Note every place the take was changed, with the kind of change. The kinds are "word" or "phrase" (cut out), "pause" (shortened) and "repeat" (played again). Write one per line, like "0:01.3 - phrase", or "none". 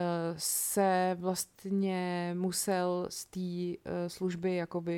none